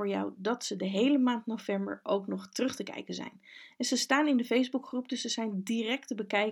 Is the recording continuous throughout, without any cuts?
yes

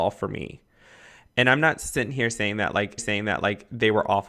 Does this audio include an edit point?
yes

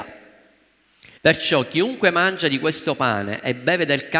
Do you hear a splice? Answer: yes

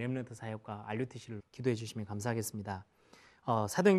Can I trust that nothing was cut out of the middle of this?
no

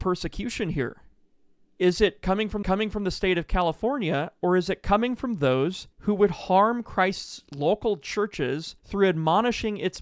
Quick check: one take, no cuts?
no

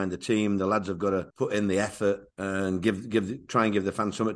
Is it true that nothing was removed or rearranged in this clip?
no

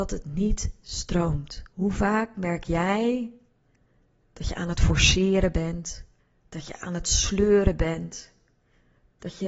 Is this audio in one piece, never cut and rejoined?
no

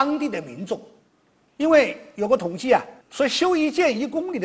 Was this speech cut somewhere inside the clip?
yes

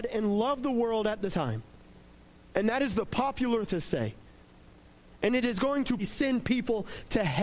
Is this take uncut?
no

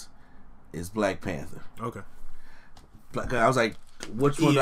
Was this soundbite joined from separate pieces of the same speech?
no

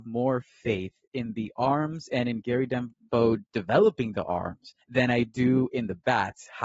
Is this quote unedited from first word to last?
no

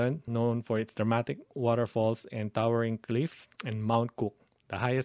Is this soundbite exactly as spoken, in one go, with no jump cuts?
no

